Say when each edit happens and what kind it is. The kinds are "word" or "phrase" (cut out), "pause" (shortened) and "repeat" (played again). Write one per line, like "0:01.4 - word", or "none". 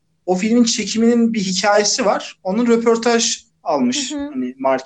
none